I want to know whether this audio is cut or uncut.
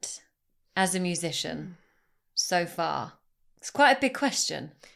uncut